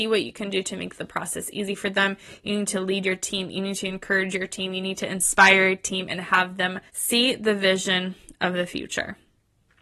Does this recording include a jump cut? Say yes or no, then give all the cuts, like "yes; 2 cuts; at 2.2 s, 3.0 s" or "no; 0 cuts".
yes; 1 cut; at 6.9 s